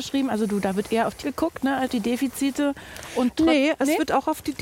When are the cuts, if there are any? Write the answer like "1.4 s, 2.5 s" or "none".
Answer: 1.2 s, 1.9 s

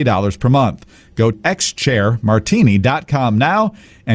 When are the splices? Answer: 1.3 s

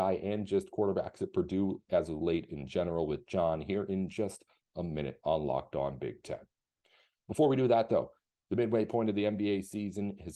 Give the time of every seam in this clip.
none

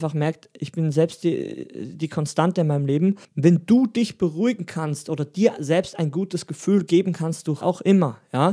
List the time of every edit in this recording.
3.2 s, 7.6 s

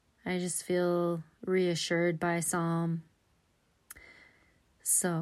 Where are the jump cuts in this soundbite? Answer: none

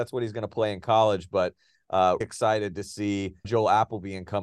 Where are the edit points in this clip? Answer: 2.2 s, 3.4 s

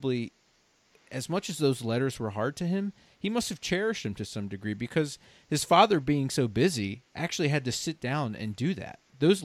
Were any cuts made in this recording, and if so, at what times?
none

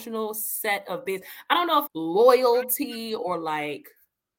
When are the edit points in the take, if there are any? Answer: 1.9 s

